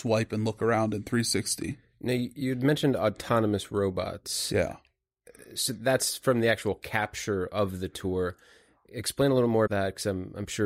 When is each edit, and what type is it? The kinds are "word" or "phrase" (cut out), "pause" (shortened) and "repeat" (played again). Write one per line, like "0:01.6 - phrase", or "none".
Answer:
0:09.7 - word